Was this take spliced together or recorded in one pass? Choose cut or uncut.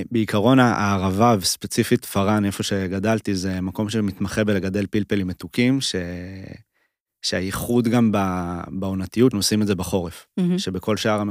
cut